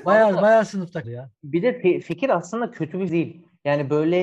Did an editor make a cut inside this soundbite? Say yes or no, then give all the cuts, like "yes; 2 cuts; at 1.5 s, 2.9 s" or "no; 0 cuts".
yes; 3 cuts; at 1.0 s, 2.0 s, 3.1 s